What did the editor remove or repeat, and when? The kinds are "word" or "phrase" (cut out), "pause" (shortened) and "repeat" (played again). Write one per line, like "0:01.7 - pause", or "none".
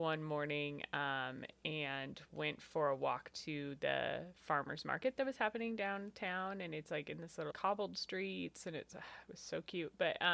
0:07.5 - word